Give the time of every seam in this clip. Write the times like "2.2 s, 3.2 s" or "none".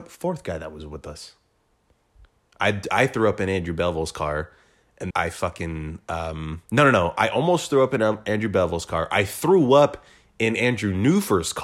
5.1 s, 6.7 s

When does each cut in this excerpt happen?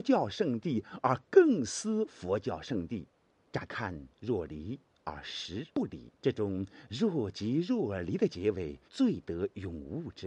3.3 s, 4.1 s, 5.7 s, 6.2 s, 8.9 s

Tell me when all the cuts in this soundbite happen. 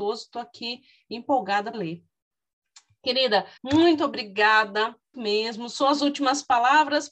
1.7 s, 3.6 s, 5.1 s

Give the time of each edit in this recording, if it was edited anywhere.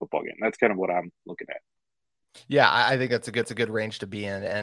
3.4 s

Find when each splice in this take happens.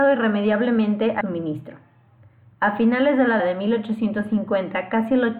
1.2 s, 3.4 s

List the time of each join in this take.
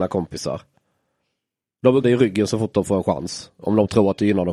2.0 s

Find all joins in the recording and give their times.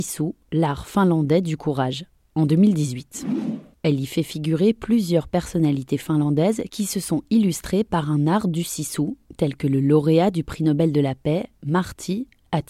none

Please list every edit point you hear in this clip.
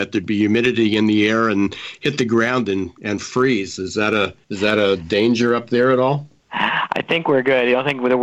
4.4 s, 6.4 s

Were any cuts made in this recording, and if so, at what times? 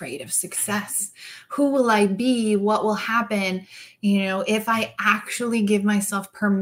none

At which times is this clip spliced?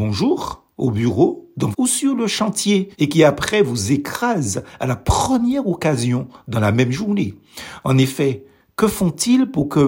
1.7 s, 2.9 s

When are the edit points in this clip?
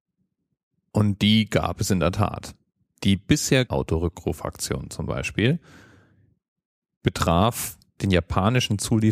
3.7 s

